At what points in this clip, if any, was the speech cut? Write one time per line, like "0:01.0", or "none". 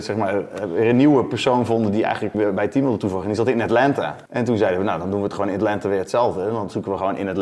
0:02.3
0:04.3